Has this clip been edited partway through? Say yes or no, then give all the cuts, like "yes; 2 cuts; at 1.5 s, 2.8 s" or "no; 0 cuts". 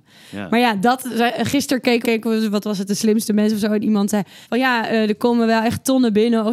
yes; 2 cuts; at 2.0 s, 4.4 s